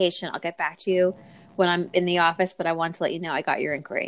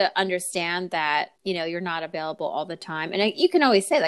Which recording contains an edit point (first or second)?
second